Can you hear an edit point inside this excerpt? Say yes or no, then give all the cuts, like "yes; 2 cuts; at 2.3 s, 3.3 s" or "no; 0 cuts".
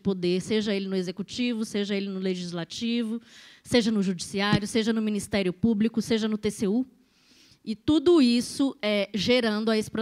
no; 0 cuts